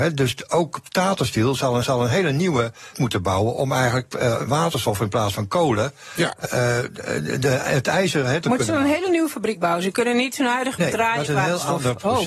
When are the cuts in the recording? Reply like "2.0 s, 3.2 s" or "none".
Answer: 1.8 s, 2.9 s, 4.5 s, 6.4 s, 8.4 s, 10.8 s, 11.2 s

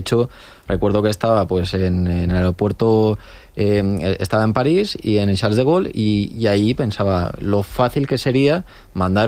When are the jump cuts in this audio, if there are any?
none

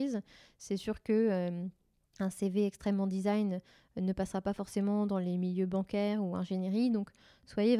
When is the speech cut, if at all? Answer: none

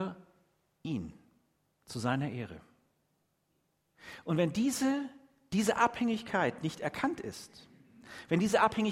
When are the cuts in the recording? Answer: none

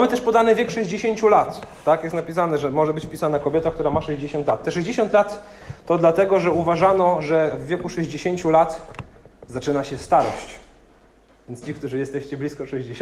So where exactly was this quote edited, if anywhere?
none

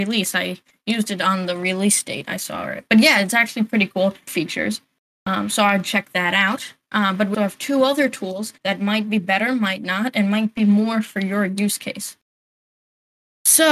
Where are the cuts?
2.9 s, 4.3 s, 7.3 s, 8.6 s

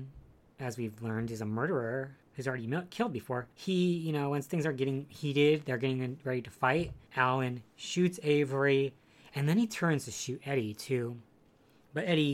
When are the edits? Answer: 2.2 s, 3.5 s, 7.1 s

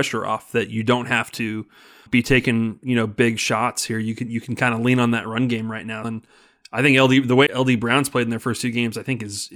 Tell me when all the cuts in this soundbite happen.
2.1 s, 6.0 s, 7.5 s

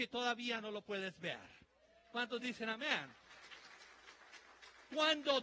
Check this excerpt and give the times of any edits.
none

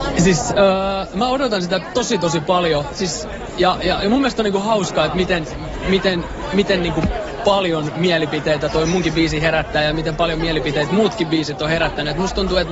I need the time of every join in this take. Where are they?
none

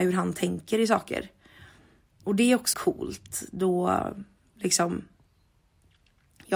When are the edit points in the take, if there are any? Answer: 2.7 s

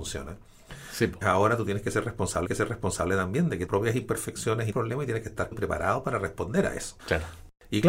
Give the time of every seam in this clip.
1.2 s, 2.4 s, 3.7 s, 4.7 s, 5.5 s, 7.0 s

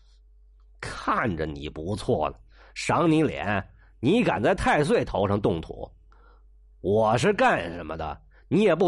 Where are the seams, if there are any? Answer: none

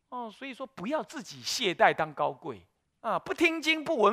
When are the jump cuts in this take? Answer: 2.8 s

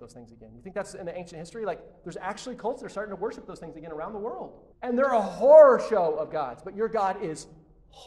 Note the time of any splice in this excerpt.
4.7 s

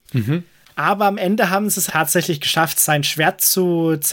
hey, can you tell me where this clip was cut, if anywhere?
1.9 s

